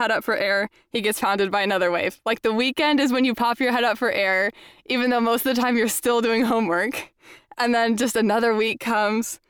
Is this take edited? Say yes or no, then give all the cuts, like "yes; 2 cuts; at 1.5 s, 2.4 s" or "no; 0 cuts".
no; 0 cuts